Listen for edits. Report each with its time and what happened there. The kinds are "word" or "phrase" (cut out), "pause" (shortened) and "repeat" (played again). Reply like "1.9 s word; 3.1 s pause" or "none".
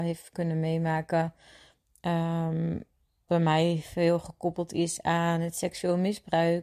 3.3 s word